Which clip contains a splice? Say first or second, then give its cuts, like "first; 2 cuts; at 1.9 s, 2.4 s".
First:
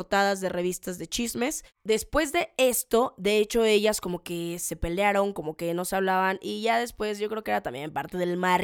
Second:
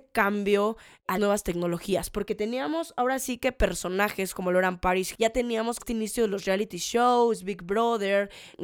second; 4 cuts; at 1.1 s, 4.3 s, 5.1 s, 5.8 s